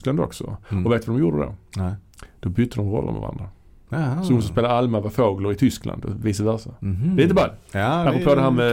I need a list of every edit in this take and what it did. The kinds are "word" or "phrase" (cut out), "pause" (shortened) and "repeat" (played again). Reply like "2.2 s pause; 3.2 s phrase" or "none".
none